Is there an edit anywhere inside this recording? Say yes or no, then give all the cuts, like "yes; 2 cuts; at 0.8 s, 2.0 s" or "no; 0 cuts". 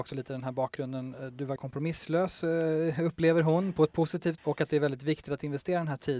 yes; 2 cuts; at 1.6 s, 4.4 s